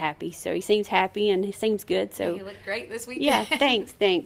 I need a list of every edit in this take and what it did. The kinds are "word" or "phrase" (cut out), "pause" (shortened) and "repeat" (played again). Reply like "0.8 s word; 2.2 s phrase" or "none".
none